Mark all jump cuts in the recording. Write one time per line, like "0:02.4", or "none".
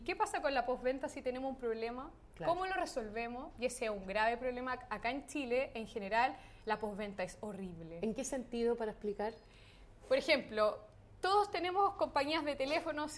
none

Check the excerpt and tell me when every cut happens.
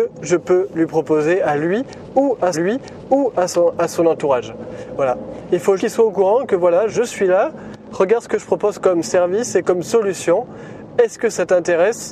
0:02.5
0:05.8
0:06.9

